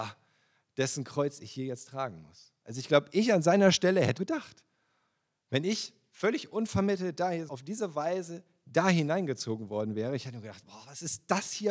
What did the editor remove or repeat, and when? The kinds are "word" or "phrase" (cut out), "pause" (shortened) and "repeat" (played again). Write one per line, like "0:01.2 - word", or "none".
0:04.2 - word
0:07.5 - word